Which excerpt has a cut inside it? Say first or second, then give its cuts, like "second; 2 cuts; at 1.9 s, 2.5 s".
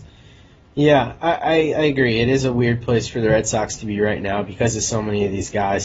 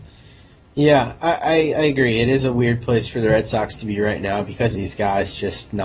second; 1 cut; at 4.7 s